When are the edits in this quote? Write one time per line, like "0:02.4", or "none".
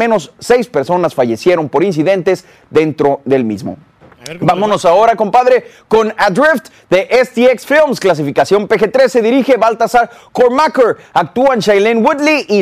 none